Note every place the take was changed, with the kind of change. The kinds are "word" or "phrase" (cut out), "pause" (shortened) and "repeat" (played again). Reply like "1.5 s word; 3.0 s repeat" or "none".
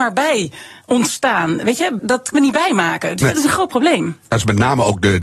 2.0 s word; 2.3 s word